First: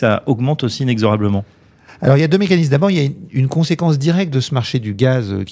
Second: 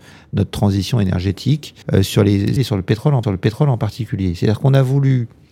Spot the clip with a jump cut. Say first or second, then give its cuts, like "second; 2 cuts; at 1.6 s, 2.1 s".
second; 3 cuts; at 1.8 s, 2.6 s, 3.2 s